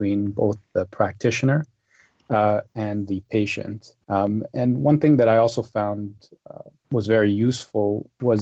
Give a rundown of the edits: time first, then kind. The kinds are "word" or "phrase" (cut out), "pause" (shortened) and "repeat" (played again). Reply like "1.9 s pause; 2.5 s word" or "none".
4.0 s pause; 6.8 s pause